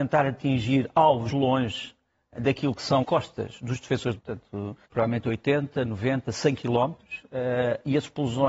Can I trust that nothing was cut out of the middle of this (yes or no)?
no